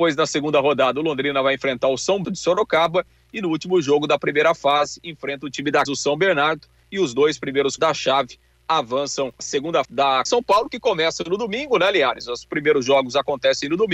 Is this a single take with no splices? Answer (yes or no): no